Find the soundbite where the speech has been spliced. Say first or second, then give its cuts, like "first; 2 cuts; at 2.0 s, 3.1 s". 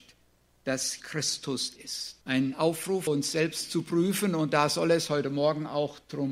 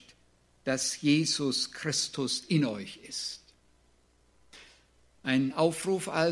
first; 4 cuts; at 1.0 s, 1.8 s, 2.2 s, 3.1 s